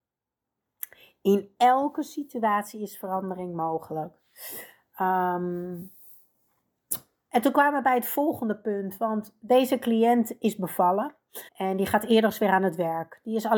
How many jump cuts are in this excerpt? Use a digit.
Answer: 1